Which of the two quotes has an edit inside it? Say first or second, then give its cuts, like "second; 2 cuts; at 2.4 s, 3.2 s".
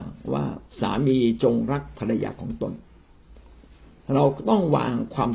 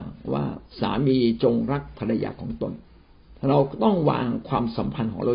second; 1 cut; at 3.4 s